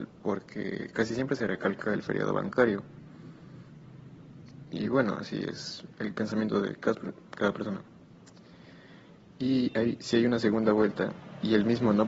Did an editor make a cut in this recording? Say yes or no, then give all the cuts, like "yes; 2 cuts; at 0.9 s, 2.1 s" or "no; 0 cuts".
no; 0 cuts